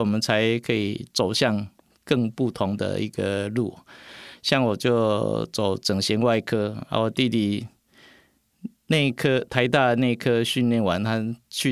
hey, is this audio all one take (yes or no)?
yes